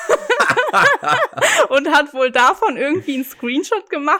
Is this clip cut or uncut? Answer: uncut